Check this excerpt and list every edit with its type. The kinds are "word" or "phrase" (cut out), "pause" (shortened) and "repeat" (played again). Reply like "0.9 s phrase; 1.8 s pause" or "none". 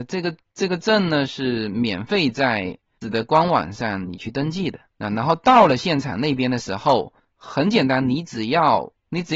3.0 s word; 4.9 s pause